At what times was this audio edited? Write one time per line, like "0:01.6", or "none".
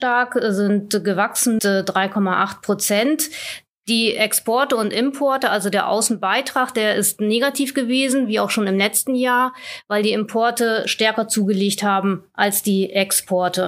0:01.6